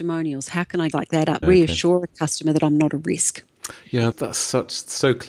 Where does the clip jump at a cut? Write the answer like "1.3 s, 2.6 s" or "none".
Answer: 0.9 s, 1.4 s, 4.1 s